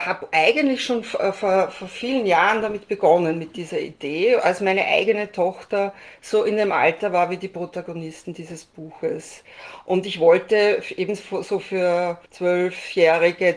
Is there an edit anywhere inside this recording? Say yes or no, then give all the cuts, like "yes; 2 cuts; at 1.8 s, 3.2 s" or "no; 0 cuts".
yes; 1 cut; at 12.3 s